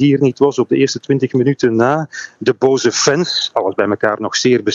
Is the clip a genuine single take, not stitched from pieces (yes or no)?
yes